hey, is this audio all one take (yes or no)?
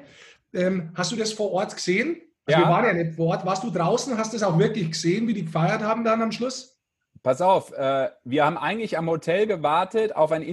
yes